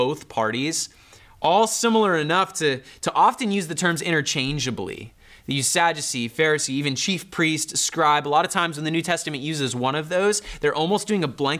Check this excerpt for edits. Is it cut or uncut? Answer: uncut